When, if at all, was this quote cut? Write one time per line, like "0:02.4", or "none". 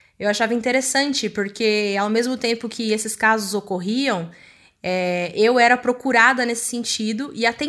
none